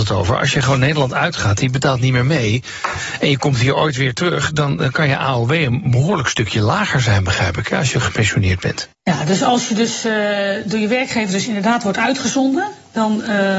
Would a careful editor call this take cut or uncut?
cut